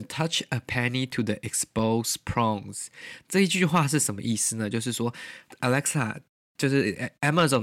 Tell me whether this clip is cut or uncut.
uncut